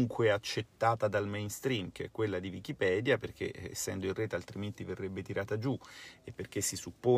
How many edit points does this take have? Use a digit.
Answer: 0